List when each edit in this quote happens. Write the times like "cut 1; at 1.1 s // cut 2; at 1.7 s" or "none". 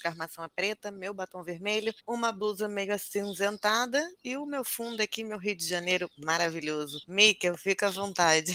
cut 1; at 2.0 s // cut 2; at 7.0 s